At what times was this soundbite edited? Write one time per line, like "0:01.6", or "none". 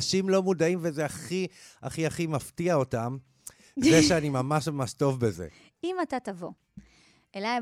none